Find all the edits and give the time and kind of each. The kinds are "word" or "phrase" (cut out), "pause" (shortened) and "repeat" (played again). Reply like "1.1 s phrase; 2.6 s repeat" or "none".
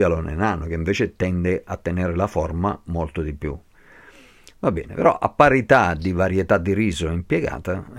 none